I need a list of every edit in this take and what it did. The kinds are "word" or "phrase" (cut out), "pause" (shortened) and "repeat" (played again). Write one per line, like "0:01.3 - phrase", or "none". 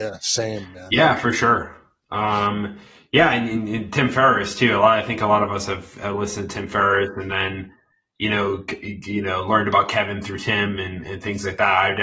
none